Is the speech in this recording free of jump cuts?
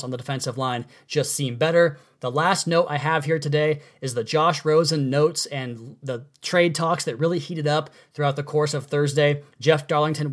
yes; 0 cuts

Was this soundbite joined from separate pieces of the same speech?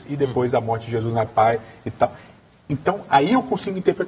yes; 1 cut; at 1.3 s

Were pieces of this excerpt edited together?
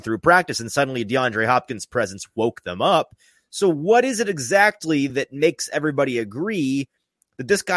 no; 0 cuts

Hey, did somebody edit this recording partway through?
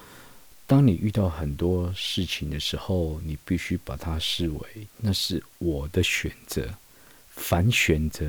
no; 0 cuts

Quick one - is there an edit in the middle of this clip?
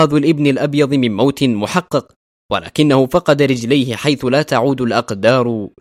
no; 0 cuts

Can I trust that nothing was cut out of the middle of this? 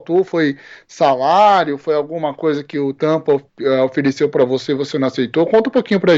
yes; 0 cuts

